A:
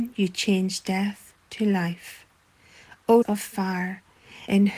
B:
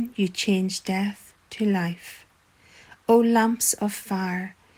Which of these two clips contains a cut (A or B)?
A